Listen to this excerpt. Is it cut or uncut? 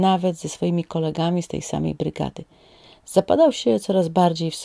uncut